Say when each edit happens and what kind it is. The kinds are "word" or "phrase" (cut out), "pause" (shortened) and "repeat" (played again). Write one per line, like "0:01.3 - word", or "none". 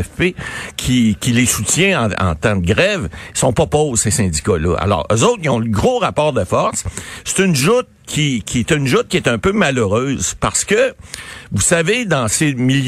none